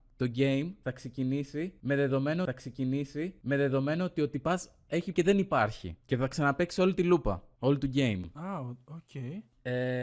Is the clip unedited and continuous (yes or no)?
no